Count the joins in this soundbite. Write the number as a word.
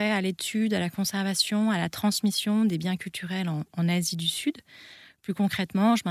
zero